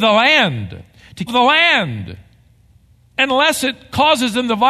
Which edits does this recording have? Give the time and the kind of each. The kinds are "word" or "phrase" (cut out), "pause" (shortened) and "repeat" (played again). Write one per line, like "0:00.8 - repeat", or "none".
0:01.3 - phrase